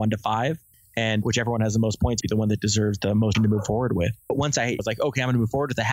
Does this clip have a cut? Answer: yes; 2 cuts; at 2.2 s, 3.3 s

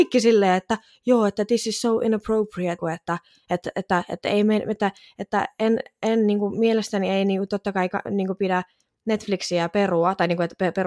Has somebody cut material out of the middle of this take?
yes; 1 cut; at 2.8 s

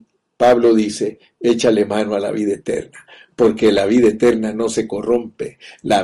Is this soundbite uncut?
yes; 0 cuts

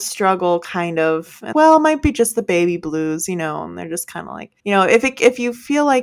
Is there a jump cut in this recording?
yes; 2 cuts; at 1.5 s, 4.6 s

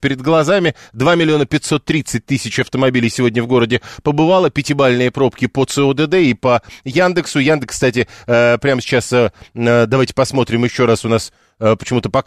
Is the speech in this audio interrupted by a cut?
no; 0 cuts

